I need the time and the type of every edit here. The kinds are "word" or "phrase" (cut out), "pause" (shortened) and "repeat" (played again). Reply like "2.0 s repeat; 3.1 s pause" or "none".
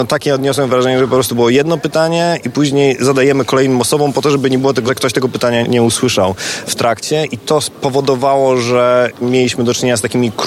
4.9 s word